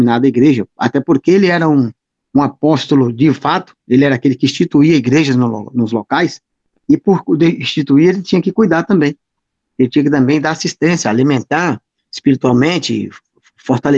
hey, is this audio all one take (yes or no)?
no